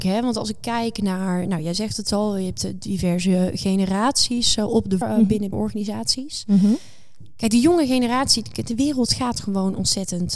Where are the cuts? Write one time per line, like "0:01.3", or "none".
0:05.0
0:05.5